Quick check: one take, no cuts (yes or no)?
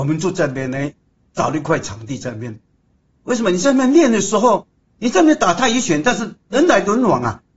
yes